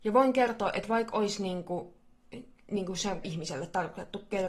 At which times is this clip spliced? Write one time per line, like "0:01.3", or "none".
0:03.2